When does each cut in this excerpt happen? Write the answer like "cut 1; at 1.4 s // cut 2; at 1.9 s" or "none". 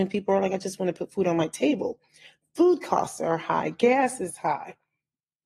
none